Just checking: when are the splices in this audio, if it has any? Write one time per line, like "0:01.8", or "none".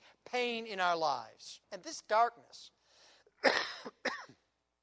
0:01.6